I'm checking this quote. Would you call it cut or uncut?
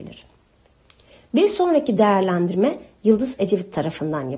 uncut